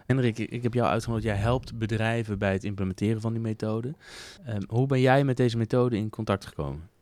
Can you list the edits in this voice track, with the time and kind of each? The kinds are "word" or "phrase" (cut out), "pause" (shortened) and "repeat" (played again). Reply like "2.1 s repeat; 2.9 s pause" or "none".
4.4 s pause